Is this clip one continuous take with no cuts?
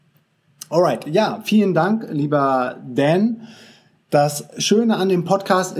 yes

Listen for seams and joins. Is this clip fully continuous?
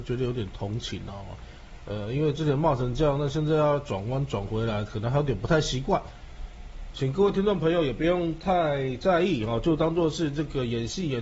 yes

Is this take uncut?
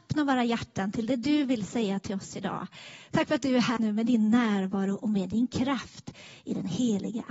no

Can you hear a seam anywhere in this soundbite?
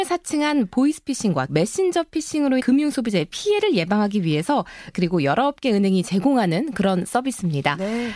yes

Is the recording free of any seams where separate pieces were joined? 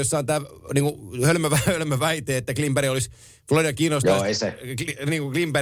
yes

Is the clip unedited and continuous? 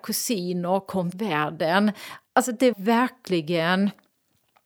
no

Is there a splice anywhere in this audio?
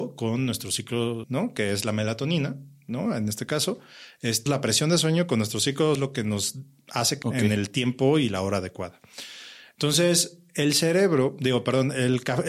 yes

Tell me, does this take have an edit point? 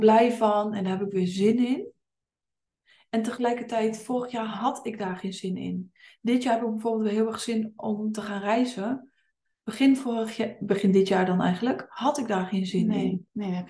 no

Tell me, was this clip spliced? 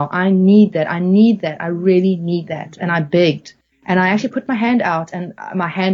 yes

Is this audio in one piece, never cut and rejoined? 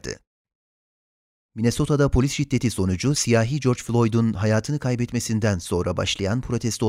yes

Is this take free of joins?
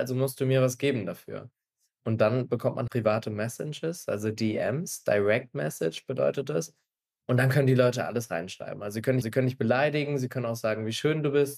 no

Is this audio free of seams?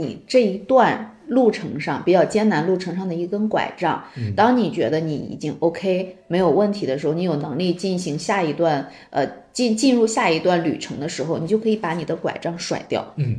yes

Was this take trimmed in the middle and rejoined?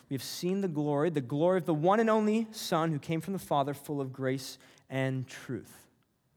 no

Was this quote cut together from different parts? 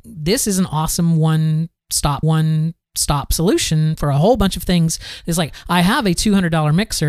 yes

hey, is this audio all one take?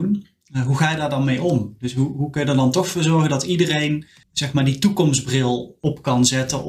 yes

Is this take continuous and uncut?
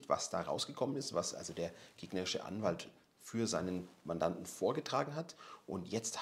yes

